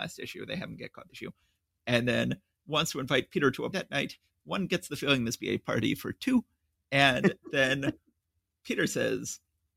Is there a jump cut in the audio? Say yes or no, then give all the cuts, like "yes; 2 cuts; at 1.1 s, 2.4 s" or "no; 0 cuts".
yes; 5 cuts; at 1.1 s, 2.5 s, 3.7 s, 5.4 s, 8.6 s